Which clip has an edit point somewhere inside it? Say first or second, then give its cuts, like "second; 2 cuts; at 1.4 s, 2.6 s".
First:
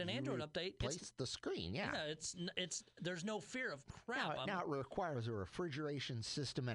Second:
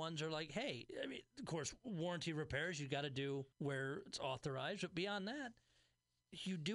second; 1 cut; at 3.5 s